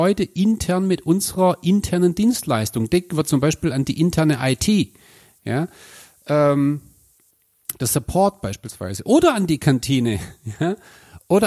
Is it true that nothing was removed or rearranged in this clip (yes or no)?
yes